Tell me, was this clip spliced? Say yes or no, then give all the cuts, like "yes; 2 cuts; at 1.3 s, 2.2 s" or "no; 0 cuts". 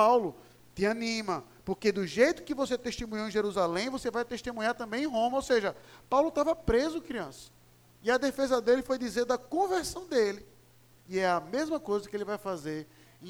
no; 0 cuts